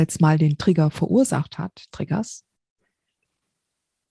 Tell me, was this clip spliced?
yes; 1 cut; at 1.9 s

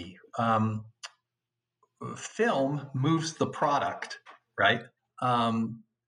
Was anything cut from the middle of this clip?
yes; 1 cut; at 5.0 s

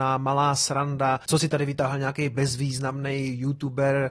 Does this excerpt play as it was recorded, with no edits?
yes; 0 cuts

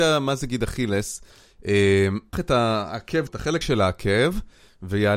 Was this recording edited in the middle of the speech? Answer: yes; 3 cuts; at 2.3 s, 3.3 s, 3.6 s

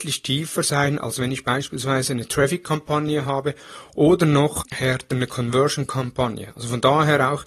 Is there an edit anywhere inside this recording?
yes; 1 cut; at 4.6 s

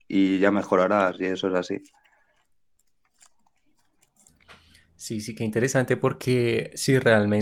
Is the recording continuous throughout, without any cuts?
yes; 0 cuts

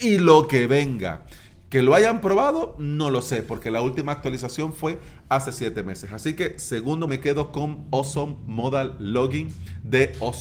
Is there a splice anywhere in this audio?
yes; 1 cut; at 7.1 s

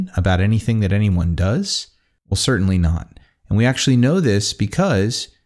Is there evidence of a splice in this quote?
no; 0 cuts

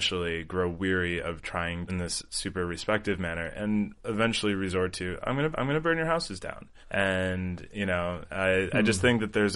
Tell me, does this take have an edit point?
yes; 3 cuts; at 1.9 s, 5.5 s, 6.8 s

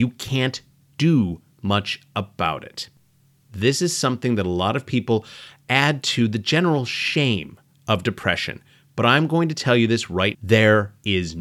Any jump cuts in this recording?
yes; 1 cut; at 10.3 s

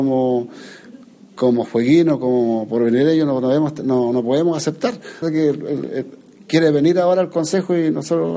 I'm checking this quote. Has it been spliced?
yes; 1 cut; at 5.2 s

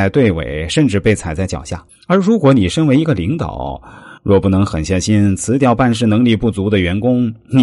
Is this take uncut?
no; 2 cuts; at 1.9 s, 4.2 s

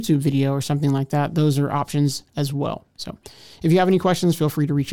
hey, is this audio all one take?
yes; 0 cuts

